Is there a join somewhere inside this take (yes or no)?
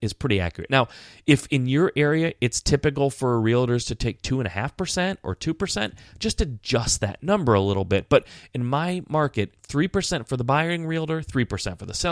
yes